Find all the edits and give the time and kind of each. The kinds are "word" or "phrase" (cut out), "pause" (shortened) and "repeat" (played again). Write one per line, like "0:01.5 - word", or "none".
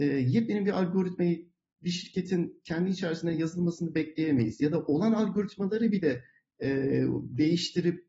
none